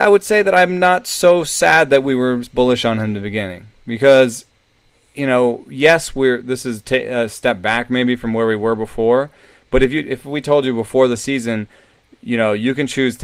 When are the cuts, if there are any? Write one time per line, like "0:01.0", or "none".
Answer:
none